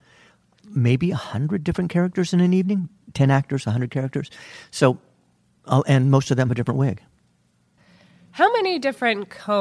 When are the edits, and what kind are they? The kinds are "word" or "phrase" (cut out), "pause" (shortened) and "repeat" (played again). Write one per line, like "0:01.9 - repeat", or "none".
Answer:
0:06.5 - word